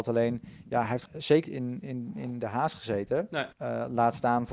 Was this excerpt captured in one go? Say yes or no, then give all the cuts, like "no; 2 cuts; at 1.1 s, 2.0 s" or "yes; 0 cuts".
no; 4 cuts; at 1.1 s, 1.4 s, 1.8 s, 3.5 s